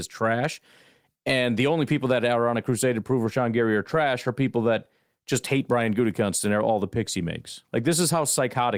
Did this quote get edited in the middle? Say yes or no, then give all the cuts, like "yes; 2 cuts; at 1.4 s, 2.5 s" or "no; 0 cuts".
no; 0 cuts